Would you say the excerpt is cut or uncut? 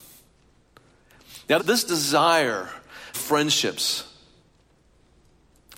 cut